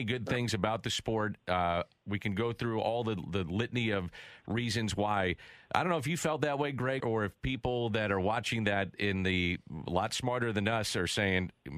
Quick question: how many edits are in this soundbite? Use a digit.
1